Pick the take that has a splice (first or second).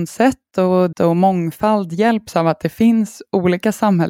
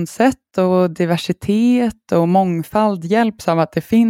first